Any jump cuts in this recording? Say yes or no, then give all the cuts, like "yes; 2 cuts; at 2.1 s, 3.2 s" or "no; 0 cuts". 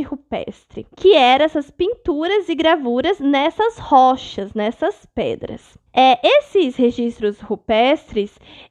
yes; 2 cuts; at 0.9 s, 5.9 s